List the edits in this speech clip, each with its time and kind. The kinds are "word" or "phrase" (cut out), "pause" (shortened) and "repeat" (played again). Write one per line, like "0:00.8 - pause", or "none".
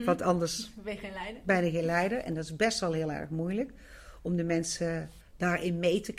0:05.2 - word